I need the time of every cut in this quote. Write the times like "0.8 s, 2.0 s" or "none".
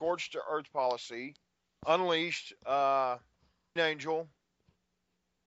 1.6 s, 3.8 s

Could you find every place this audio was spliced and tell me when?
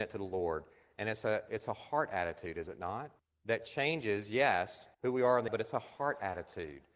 3.2 s, 4.9 s, 5.5 s

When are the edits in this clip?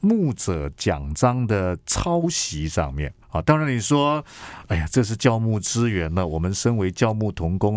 3.2 s

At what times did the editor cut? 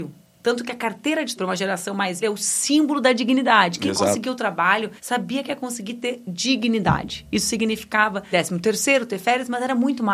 1.4 s, 2.2 s, 5.0 s, 8.3 s

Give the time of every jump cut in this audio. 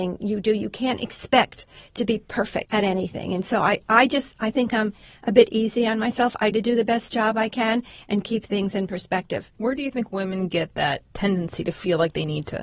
6.5 s

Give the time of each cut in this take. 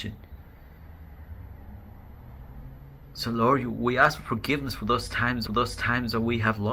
5.5 s

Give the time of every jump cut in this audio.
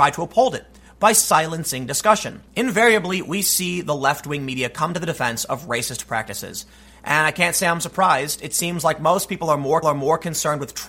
9.8 s

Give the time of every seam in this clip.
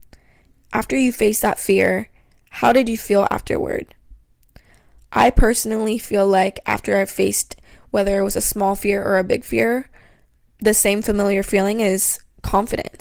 none

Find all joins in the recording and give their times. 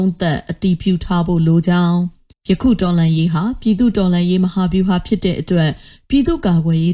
2.3 s

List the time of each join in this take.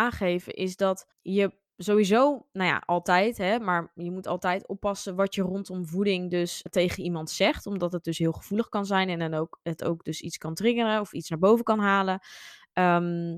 1.1 s, 6.7 s

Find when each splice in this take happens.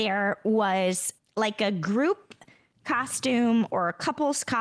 1.2 s

